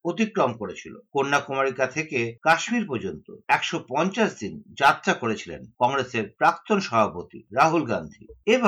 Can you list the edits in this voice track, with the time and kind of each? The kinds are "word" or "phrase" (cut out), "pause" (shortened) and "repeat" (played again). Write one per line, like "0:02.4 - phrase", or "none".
none